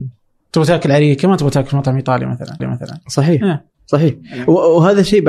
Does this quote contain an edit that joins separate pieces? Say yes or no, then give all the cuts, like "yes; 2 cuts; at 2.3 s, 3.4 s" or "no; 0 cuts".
yes; 2 cuts; at 2.6 s, 3.7 s